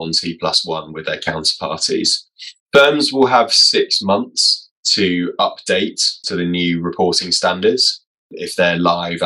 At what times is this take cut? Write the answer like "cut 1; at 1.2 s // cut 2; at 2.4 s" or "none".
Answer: cut 1; at 2.6 s // cut 2; at 6.2 s